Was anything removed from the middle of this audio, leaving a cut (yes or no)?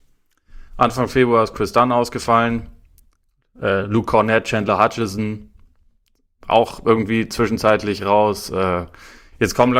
no